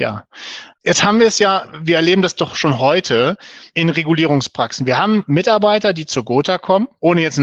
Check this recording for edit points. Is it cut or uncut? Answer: uncut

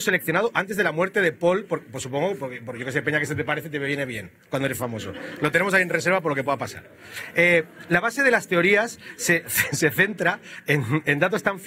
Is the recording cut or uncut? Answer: uncut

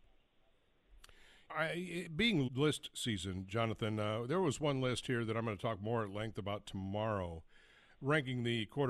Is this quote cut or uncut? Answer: cut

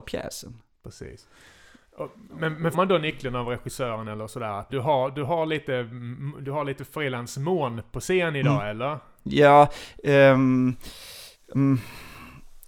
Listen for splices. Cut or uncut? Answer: cut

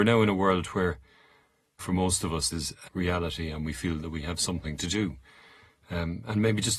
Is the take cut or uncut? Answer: cut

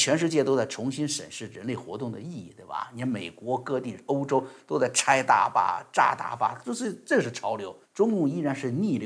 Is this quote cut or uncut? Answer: cut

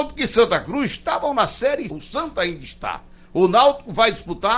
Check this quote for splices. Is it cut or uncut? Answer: cut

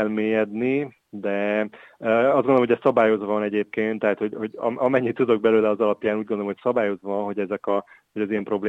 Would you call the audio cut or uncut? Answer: uncut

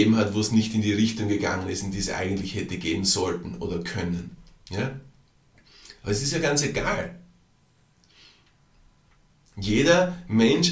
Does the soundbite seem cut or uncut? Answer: uncut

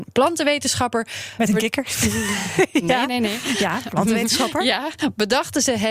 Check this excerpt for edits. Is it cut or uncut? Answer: uncut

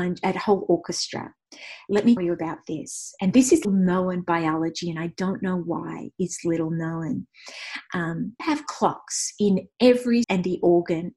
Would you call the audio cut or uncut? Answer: cut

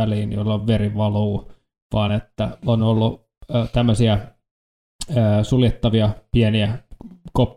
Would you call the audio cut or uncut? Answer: uncut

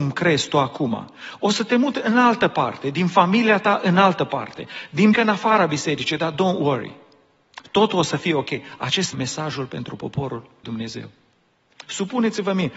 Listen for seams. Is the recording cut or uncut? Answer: cut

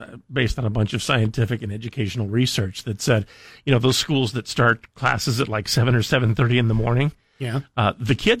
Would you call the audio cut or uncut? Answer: uncut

